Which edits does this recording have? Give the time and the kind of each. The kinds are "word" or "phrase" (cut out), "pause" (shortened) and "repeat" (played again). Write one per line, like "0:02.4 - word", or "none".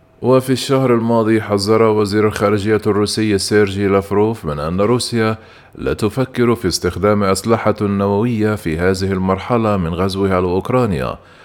none